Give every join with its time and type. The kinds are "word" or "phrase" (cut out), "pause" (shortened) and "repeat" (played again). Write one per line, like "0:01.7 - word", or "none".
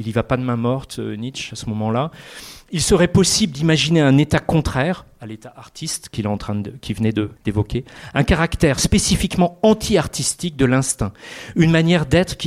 0:07.4 - pause